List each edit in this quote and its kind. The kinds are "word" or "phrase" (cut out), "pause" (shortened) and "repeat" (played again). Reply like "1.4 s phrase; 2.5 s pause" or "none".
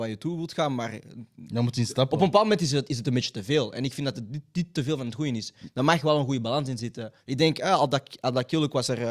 7.2 s pause